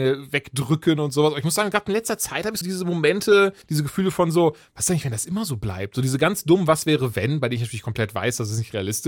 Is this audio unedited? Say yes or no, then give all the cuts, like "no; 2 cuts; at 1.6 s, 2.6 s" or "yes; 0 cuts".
no; 2 cuts; at 2.6 s, 3.6 s